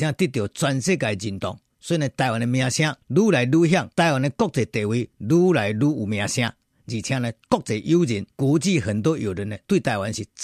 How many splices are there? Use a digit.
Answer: 5